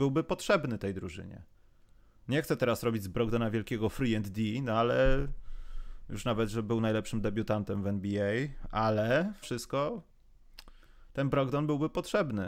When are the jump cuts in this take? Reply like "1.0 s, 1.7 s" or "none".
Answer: 9.4 s